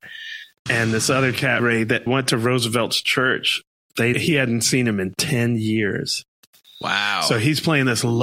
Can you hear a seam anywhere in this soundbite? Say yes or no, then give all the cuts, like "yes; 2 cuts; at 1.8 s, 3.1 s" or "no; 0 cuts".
yes; 3 cuts; at 1.6 s, 2.1 s, 4.1 s